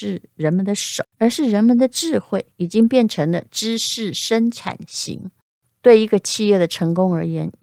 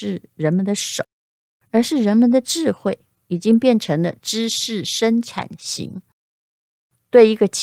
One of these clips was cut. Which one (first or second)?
first